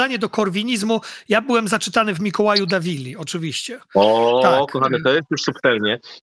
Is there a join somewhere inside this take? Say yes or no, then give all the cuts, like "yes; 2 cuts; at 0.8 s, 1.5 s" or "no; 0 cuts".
no; 0 cuts